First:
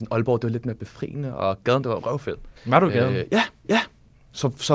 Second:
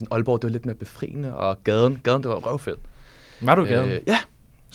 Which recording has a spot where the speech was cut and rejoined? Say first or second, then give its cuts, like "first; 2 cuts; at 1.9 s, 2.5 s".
first; 3 cuts; at 1.6 s, 2.6 s, 3.6 s